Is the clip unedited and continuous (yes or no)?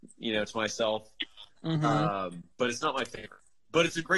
no